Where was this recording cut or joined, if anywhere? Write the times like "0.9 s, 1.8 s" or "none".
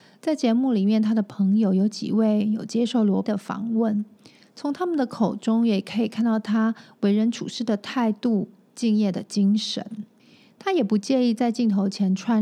3.2 s